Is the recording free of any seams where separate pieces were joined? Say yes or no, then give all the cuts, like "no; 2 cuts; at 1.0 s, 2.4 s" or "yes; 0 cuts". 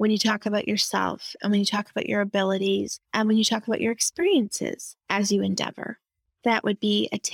no; 2 cuts; at 3.0 s, 5.0 s